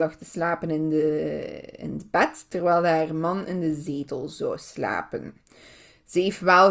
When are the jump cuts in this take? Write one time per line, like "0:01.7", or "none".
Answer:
none